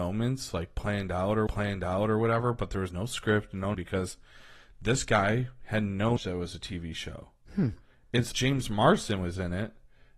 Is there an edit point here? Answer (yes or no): yes